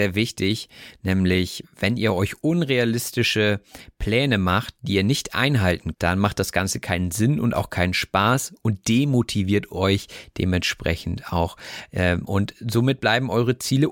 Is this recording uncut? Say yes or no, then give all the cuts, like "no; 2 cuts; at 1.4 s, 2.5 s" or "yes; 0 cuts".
no; 1 cut; at 5.9 s